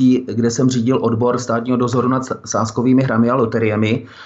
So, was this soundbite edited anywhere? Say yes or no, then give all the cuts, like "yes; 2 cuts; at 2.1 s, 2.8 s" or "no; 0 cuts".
no; 0 cuts